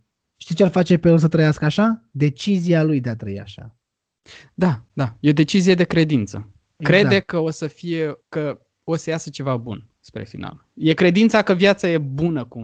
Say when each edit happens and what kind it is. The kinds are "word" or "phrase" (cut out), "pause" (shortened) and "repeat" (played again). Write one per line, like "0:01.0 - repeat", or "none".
0:02.1 - pause
0:08.2 - pause